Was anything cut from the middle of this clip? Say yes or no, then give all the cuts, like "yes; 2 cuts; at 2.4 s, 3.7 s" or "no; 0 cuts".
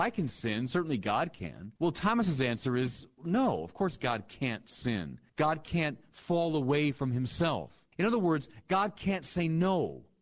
yes; 3 cuts; at 1.8 s, 5.3 s, 7.9 s